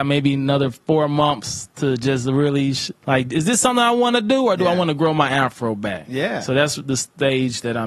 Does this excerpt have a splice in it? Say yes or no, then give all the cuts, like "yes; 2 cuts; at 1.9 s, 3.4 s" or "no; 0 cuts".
yes; 1 cut; at 3.0 s